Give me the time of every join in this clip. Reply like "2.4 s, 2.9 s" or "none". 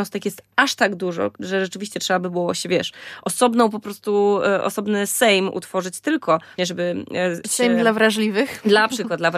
1.4 s, 6.6 s, 7.4 s